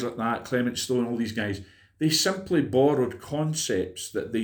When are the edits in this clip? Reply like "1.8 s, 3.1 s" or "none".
none